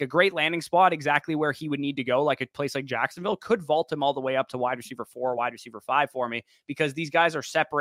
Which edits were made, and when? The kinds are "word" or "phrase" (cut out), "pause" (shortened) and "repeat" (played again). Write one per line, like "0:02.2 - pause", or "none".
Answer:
none